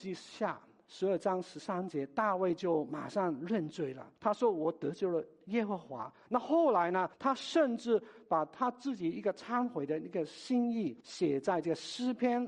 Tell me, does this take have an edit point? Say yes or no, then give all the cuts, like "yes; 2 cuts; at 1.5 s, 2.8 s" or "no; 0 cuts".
yes; 3 cuts; at 4.2 s, 7.1 s, 11.0 s